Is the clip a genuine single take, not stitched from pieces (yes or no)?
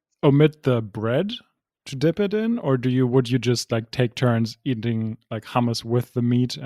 yes